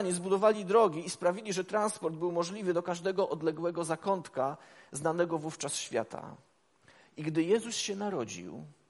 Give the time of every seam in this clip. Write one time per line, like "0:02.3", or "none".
none